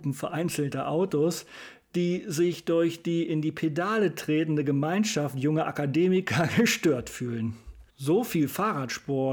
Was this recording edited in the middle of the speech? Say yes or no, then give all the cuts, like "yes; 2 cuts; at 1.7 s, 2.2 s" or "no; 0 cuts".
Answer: yes; 1 cut; at 7.9 s